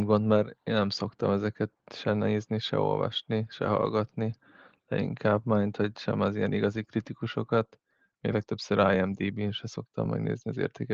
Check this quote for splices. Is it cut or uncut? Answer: uncut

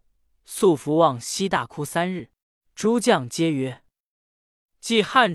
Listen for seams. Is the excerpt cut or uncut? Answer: cut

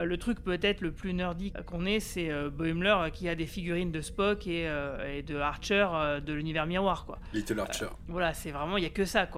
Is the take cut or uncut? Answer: uncut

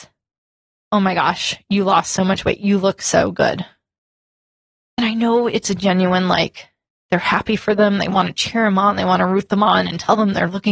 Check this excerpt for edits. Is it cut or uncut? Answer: uncut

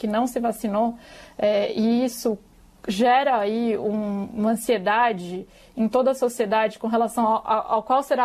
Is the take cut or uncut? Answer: uncut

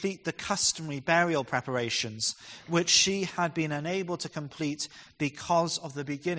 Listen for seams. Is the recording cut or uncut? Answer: uncut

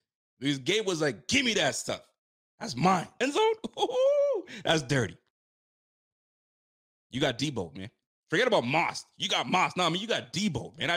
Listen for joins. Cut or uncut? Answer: cut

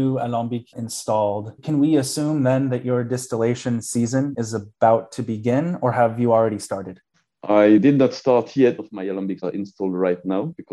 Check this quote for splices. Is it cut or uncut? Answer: cut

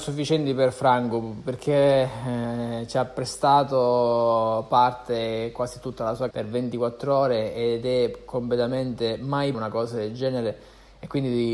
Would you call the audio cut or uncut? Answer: cut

